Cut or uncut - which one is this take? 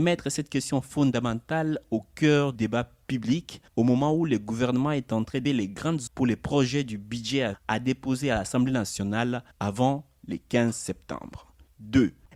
cut